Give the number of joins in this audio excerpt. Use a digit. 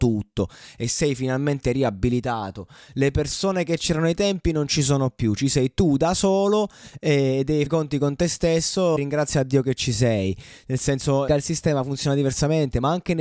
3